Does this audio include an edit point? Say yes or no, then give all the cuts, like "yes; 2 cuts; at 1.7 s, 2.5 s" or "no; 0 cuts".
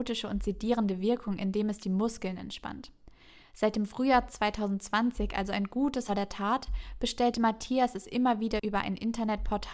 yes; 1 cut; at 6.1 s